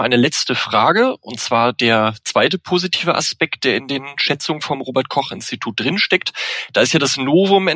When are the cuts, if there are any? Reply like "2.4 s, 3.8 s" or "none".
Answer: none